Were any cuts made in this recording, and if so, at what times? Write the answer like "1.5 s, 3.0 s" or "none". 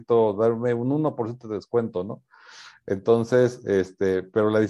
none